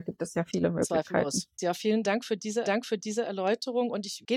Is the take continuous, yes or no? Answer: no